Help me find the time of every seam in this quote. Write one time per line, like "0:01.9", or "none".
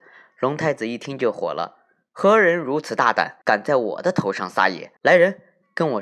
0:03.4
0:05.0

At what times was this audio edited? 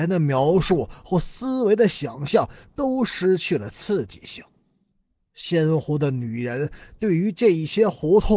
0:04.9

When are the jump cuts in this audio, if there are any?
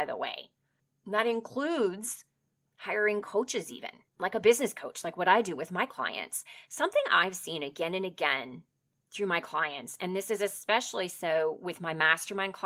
0:04.1

